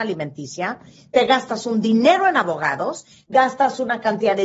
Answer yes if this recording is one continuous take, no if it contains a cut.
yes